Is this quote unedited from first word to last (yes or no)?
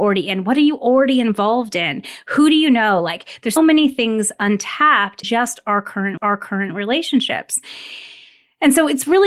no